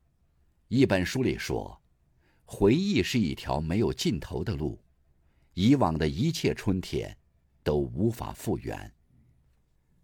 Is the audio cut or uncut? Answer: uncut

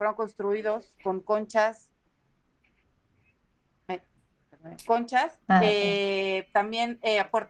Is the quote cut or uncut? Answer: cut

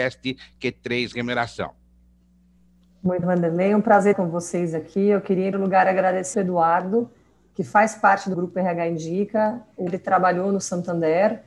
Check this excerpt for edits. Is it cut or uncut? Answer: cut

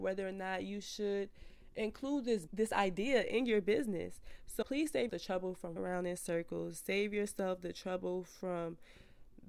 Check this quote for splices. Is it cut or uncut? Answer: cut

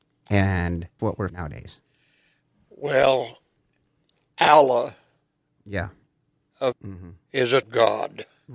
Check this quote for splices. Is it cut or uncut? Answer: cut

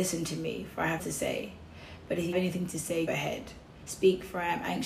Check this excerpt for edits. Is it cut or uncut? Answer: cut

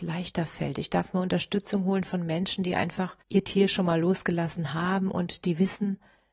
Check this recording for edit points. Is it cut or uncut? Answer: cut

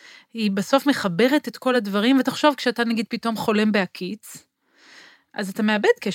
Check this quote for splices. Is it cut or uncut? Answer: uncut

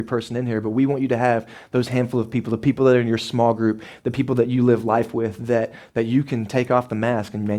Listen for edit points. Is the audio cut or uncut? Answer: uncut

